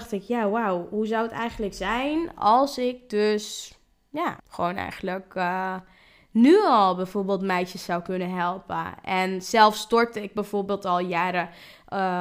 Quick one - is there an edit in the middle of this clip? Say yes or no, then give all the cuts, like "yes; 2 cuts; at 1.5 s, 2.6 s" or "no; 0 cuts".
yes; 1 cut; at 4.4 s